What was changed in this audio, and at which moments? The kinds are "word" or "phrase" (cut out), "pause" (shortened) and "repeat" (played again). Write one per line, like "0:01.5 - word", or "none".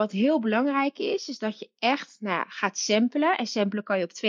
none